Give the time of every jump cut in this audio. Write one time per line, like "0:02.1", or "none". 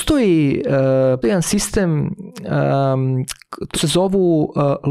0:01.2
0:03.7